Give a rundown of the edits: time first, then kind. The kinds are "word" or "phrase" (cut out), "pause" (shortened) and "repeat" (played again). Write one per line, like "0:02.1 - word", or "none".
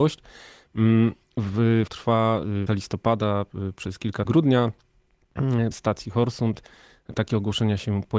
0:01.9 - phrase
0:02.7 - phrase
0:04.3 - word
0:05.7 - phrase

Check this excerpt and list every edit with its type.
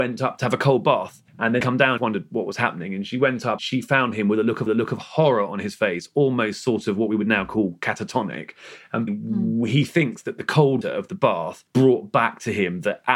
0:01.3 - pause
0:01.6 - phrase
0:02.0 - phrase
0:03.6 - word
0:04.7 - repeat
0:09.1 - word
0:10.8 - word
0:11.7 - pause

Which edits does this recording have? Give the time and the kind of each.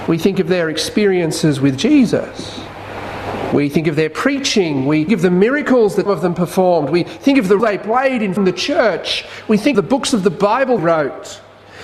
0:05.1 - word
0:06.1 - word
0:07.6 - word
0:08.4 - word
0:09.7 - word
0:10.8 - word

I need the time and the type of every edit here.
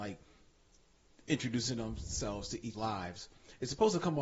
0:02.7 - word

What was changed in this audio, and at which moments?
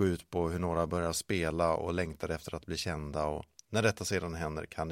none

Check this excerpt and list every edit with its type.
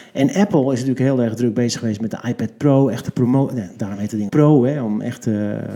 0:04.3 - word

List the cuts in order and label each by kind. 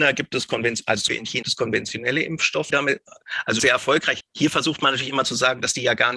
0:01.1 - word
0:01.4 - word
0:02.7 - word
0:03.6 - word
0:04.2 - word

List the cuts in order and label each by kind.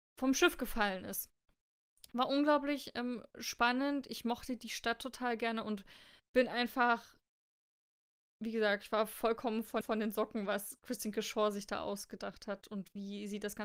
0:09.8 - repeat

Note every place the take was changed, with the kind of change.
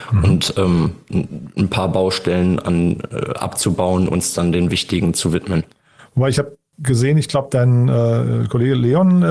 0:04.1 - word

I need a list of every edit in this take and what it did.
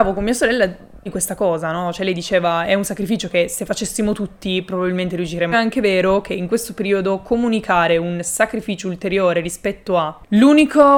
0:01.1 - word
0:05.5 - phrase

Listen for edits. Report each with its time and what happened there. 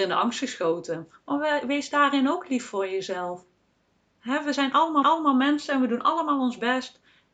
0:05.0 - repeat

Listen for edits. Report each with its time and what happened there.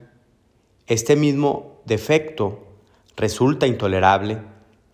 none

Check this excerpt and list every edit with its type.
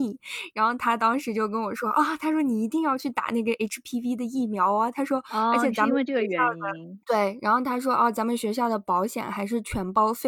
0:07.0 - pause

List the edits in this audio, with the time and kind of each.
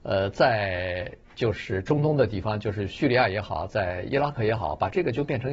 0:01.2 - pause

